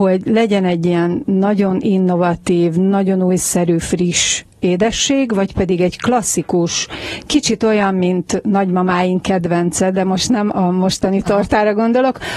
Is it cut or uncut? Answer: uncut